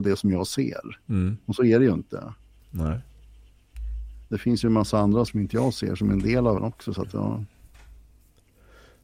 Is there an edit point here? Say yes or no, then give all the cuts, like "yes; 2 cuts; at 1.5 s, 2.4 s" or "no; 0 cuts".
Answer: yes; 2 cuts; at 5.3 s, 6.6 s